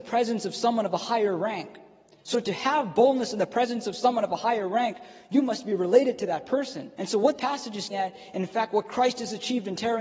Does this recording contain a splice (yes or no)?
yes